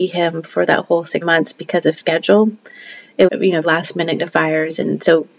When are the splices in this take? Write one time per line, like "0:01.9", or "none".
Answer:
0:01.2
0:01.9
0:03.3
0:03.6
0:04.2